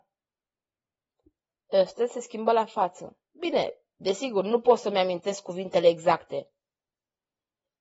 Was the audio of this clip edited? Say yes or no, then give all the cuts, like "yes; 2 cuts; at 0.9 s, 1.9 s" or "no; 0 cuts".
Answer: yes; 1 cut; at 3.2 s